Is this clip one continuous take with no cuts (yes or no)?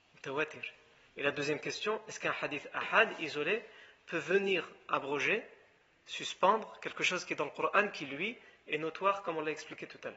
yes